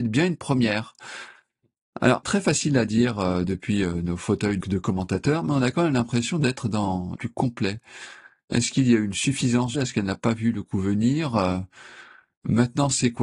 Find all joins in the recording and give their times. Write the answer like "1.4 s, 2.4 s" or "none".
2.2 s, 4.6 s, 7.2 s, 9.7 s